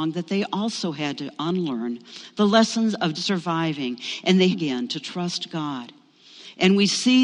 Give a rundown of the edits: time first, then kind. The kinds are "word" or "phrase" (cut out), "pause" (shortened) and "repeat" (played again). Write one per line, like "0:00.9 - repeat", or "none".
0:03.1 - word
0:04.5 - phrase